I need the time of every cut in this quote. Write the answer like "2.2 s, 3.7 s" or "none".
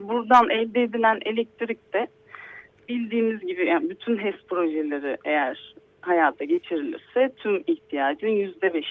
none